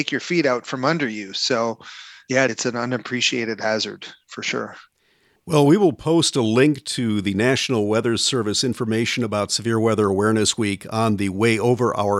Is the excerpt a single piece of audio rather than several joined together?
no; 1 cut; at 2.5 s

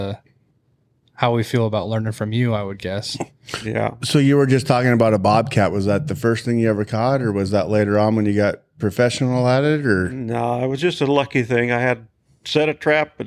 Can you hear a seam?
no; 0 cuts

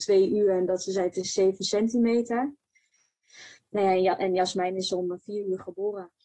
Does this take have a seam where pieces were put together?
yes; 1 cut; at 3.6 s

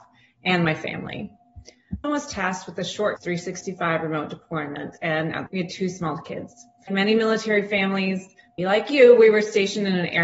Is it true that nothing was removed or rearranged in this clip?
no; 5 cuts; at 2.0 s, 3.2 s, 5.5 s, 6.9 s, 8.6 s

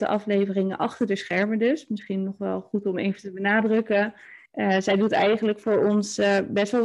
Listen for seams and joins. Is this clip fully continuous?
no; 1 cut; at 4.5 s

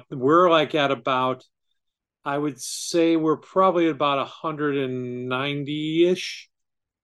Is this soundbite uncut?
yes; 0 cuts

